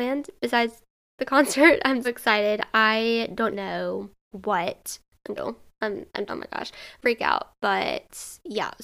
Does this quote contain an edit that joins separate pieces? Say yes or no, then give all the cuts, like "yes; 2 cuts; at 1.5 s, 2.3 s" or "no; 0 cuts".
yes; 7 cuts; at 1.2 s, 2.0 s, 3.5 s, 4.3 s, 5.4 s, 6.3 s, 7.0 s